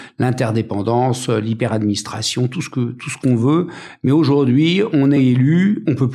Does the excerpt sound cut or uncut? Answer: uncut